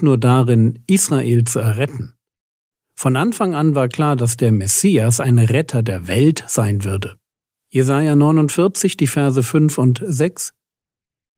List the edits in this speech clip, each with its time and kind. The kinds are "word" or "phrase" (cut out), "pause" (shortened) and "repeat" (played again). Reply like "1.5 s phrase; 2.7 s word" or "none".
7.3 s pause